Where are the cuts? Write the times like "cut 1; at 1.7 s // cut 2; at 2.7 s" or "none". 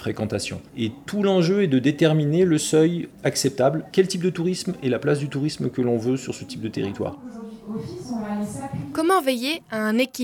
cut 1; at 3.1 s